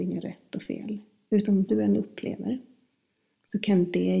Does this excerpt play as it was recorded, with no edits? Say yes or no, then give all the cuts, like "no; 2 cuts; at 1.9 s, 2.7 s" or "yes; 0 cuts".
no; 1 cut; at 1.7 s